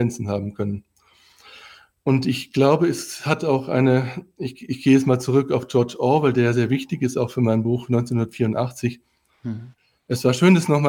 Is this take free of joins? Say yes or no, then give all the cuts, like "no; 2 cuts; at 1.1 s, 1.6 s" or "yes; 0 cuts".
yes; 0 cuts